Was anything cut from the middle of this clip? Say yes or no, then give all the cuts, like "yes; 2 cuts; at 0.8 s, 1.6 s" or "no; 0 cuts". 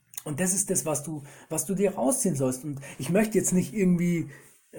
no; 0 cuts